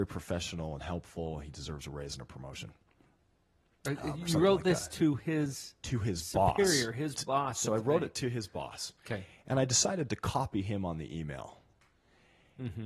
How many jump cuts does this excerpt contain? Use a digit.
0